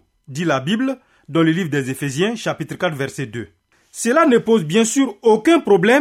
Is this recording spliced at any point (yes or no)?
yes